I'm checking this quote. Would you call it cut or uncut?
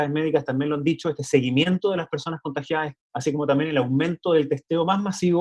cut